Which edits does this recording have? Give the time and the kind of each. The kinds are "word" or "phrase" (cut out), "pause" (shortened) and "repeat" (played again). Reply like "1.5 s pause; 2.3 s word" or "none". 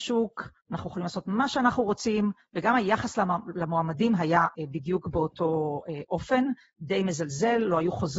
4.5 s word